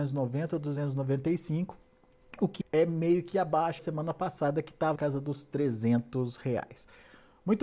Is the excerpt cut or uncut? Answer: cut